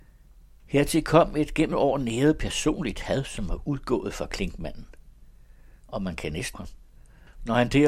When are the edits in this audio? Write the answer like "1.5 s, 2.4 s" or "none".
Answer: 1.7 s, 5.8 s, 6.5 s

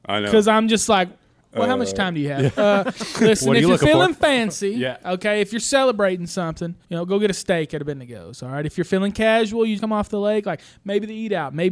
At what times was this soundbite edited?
6.8 s, 9.8 s

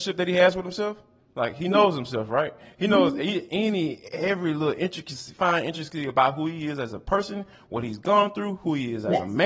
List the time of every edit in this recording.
none

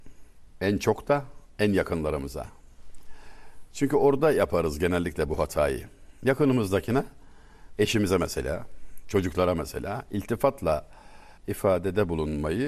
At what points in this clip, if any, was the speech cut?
11.4 s

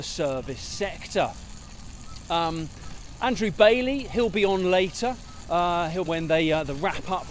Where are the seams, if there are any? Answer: 6.1 s

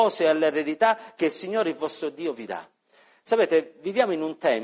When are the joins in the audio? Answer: none

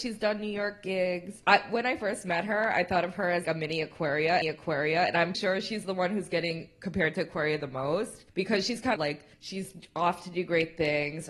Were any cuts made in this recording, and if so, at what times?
1.4 s, 3.4 s, 4.4 s, 5.3 s, 8.3 s, 9.0 s, 9.3 s

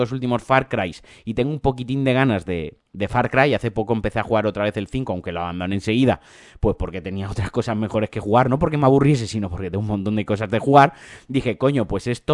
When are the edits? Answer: none

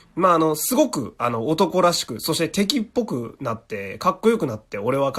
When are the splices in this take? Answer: none

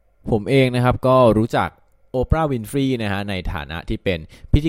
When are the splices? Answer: none

